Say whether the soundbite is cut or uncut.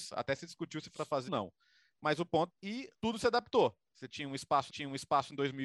cut